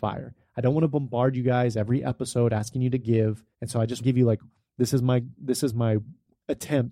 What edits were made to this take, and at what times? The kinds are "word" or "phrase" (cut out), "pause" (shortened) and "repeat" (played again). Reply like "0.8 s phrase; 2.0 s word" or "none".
3.5 s pause; 4.0 s word